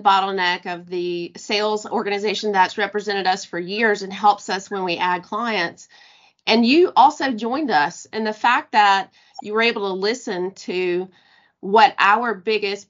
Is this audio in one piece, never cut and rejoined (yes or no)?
yes